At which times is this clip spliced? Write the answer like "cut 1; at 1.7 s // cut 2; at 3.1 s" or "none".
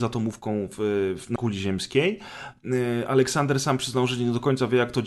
cut 1; at 1.4 s

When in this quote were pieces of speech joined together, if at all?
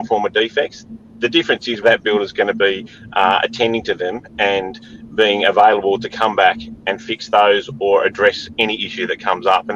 cut 1; at 1.8 s // cut 2; at 6.8 s

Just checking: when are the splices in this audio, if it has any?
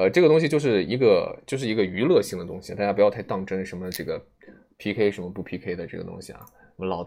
none

